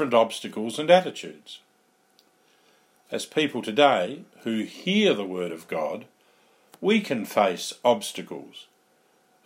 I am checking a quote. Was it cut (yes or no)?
yes